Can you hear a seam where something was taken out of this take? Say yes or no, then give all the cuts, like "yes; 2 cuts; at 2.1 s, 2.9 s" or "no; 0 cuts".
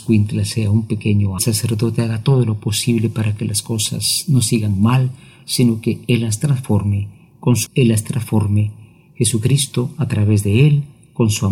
yes; 2 cuts; at 1.4 s, 7.7 s